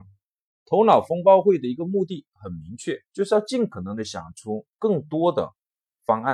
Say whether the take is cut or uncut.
cut